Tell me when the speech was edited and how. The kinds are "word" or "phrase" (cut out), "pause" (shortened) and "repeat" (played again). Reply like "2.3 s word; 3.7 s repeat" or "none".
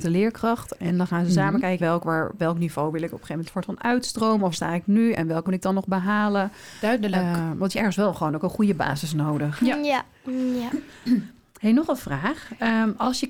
1.8 s word; 2.4 s word; 3.5 s word; 4.5 s word; 5.5 s word; 7.7 s word